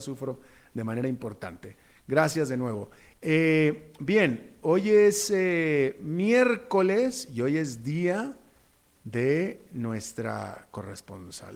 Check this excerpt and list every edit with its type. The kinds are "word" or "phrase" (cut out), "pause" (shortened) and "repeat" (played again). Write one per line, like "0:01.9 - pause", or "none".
none